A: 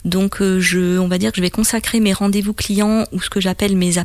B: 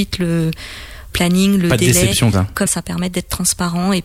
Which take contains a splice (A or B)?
B